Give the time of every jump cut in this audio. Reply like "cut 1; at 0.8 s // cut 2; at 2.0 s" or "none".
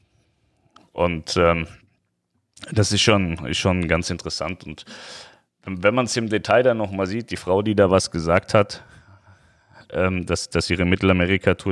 none